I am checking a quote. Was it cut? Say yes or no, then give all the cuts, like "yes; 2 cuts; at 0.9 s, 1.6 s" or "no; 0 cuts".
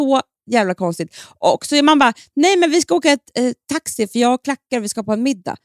no; 0 cuts